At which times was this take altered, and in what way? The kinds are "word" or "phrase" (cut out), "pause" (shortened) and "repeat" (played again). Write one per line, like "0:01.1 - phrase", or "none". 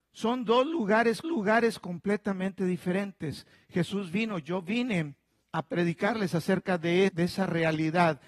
0:01.2 - repeat
0:05.4 - pause
0:07.1 - word